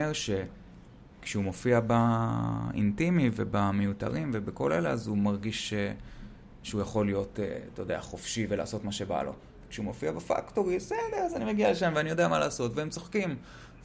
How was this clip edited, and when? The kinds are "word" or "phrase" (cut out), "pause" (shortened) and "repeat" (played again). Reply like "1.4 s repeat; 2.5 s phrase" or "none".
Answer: none